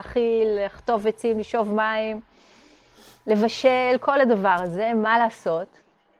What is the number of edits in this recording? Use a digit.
0